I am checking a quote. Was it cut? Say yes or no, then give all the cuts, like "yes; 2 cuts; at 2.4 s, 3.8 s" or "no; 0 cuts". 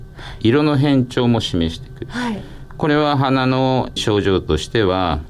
yes; 1 cut; at 4.0 s